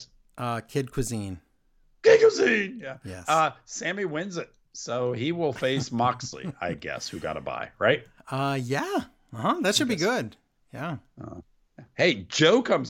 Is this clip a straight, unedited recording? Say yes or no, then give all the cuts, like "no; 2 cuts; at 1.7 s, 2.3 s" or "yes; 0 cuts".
yes; 0 cuts